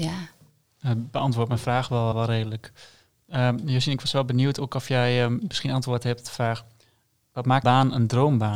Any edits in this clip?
yes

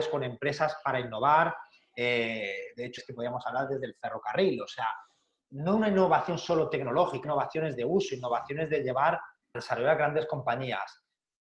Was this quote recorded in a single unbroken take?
no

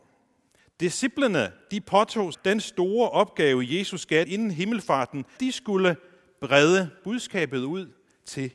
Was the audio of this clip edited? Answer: yes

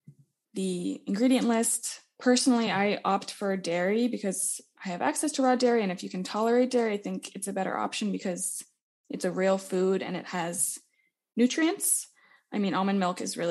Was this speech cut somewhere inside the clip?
no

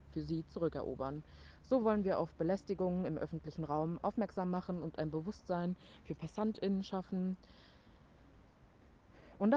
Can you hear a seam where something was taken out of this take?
no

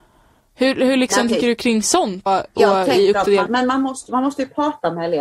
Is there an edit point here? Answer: yes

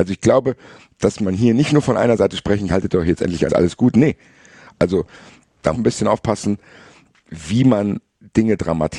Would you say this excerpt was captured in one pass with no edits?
no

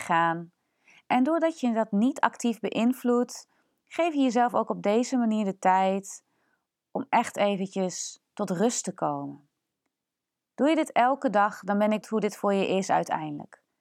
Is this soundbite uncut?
no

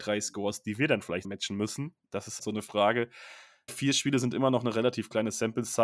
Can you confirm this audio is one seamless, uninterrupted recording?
no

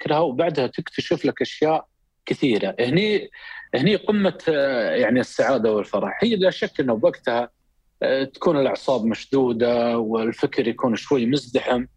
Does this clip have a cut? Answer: no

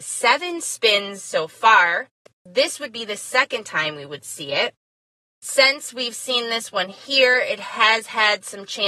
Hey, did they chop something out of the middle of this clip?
no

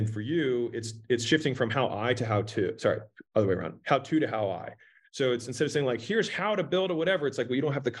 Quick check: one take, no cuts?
yes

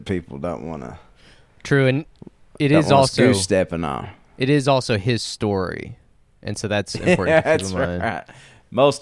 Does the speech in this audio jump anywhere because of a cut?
no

